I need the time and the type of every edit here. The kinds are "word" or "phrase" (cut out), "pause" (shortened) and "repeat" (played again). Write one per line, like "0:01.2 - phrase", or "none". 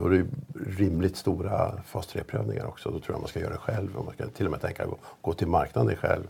none

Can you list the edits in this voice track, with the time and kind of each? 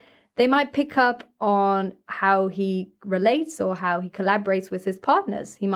none

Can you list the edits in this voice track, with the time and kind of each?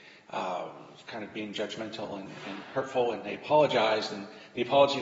none

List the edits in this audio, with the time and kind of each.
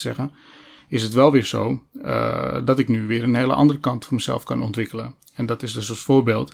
none

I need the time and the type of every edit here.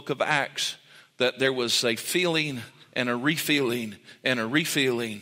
none

